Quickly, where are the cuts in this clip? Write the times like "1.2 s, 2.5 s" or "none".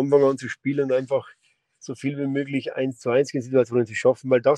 none